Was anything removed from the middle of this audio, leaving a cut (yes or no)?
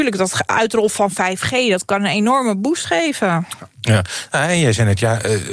no